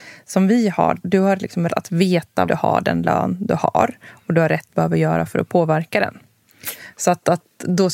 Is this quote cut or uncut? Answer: cut